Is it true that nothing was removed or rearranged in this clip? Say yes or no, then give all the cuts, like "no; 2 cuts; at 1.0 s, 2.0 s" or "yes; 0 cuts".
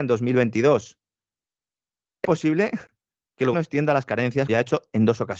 no; 3 cuts; at 2.2 s, 3.5 s, 4.5 s